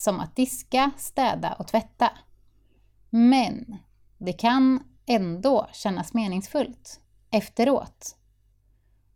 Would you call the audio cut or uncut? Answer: uncut